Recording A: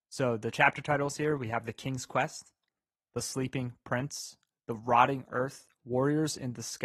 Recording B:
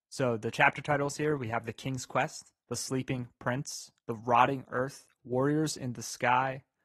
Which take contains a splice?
B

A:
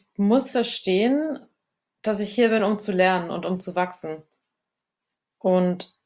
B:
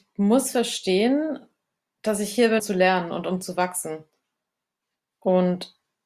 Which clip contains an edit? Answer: B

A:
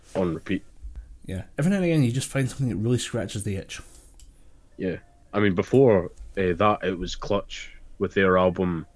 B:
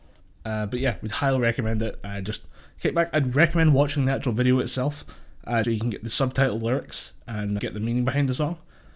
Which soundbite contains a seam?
B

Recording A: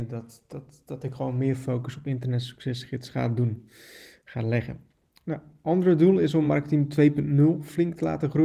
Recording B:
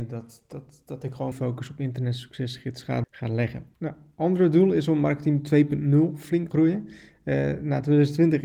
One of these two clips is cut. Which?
B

